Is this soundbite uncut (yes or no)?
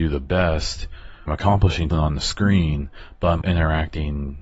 no